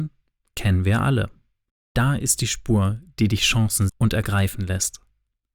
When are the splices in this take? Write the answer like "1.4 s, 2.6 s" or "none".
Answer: 3.9 s